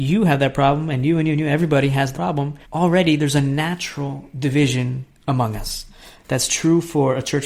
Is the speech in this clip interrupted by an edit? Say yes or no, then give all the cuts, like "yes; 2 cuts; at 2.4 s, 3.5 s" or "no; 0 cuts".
yes; 2 cuts; at 2.1 s, 2.6 s